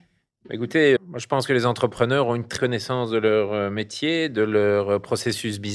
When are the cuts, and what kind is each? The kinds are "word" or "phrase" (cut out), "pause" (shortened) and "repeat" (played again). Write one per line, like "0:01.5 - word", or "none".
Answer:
0:01.0 - word
0:02.6 - word